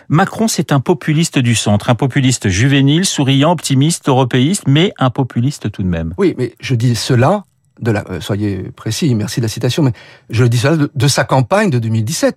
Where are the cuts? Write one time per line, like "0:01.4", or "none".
none